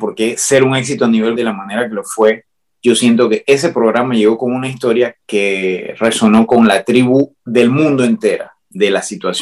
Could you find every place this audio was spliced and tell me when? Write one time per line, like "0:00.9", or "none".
0:01.4

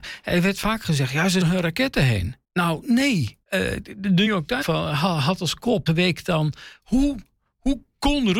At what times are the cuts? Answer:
0:01.4
0:02.4
0:03.4
0:04.3
0:04.6
0:05.9

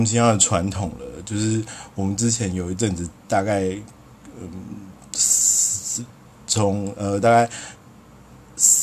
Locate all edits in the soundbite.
none

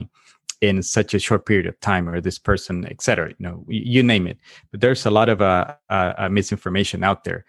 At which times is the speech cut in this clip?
none

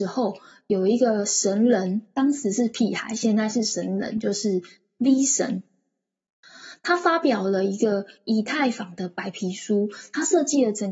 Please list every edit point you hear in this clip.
none

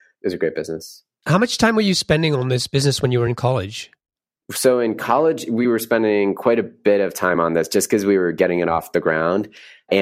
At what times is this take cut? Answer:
none

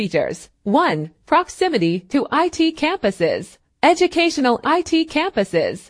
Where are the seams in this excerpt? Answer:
0:04.6

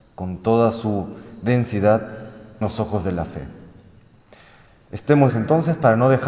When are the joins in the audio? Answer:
0:02.6
0:05.3

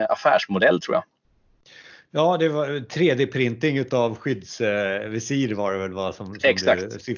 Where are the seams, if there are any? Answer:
none

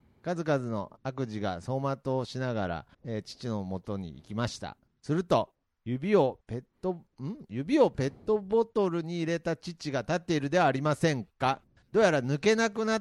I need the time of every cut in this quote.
0:01.0
0:02.9
0:05.6

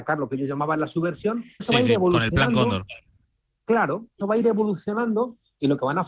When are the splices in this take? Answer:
0:01.6
0:04.2

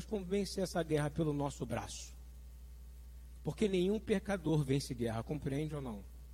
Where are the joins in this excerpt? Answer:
none

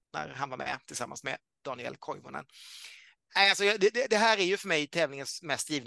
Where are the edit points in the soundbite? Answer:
none

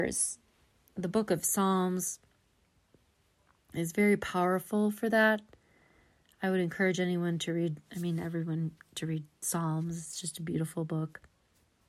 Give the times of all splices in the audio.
none

